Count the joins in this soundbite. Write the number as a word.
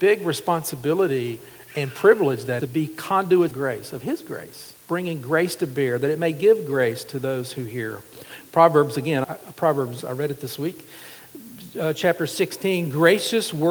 five